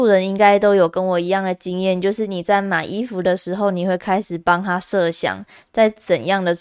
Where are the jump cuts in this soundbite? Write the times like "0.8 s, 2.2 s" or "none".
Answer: none